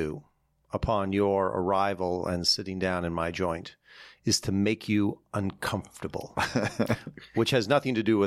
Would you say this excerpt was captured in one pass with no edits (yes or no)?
yes